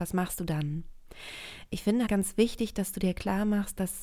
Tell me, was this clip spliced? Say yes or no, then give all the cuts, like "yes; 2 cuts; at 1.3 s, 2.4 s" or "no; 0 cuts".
yes; 1 cut; at 2.1 s